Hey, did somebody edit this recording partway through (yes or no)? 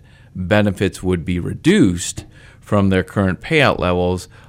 no